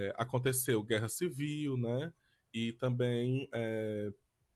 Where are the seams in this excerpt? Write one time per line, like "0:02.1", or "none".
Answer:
none